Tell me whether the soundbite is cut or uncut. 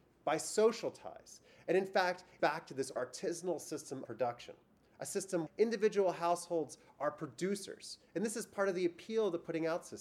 cut